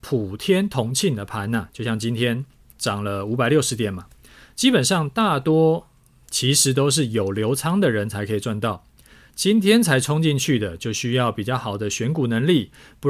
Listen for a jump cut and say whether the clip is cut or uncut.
cut